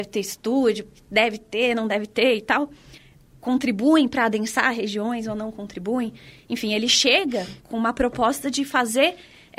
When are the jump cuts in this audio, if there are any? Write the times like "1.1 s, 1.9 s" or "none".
none